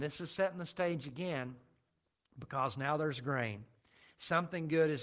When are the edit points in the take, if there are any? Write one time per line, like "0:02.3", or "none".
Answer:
none

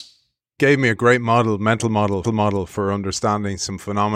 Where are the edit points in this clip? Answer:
0:02.2

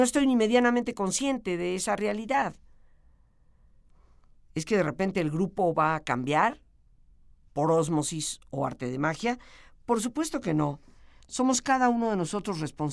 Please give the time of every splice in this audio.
none

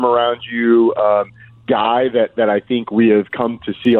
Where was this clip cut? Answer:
none

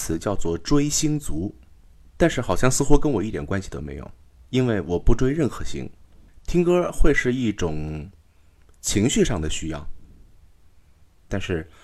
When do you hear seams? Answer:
none

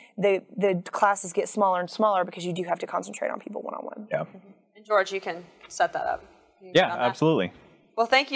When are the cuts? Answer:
none

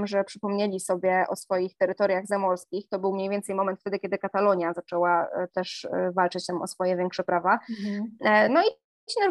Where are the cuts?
0:05.5

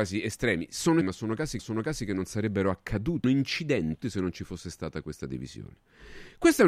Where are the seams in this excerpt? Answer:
0:01.0
0:01.6
0:03.2
0:04.0

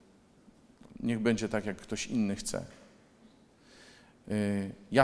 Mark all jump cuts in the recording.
none

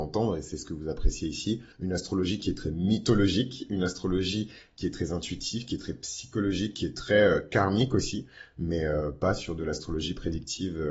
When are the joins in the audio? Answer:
0:01.7

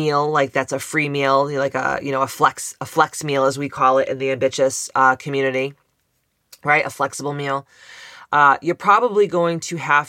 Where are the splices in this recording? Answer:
none

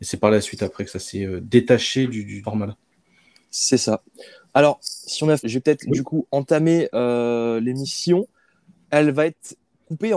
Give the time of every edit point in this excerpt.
0:02.4
0:05.4

